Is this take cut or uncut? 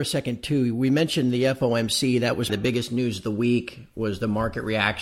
cut